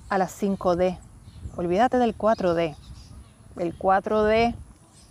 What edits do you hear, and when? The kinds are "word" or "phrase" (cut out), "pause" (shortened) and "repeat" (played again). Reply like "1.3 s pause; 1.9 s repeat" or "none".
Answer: none